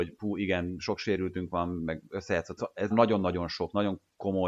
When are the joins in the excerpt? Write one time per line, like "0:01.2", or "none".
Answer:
0:02.6
0:02.9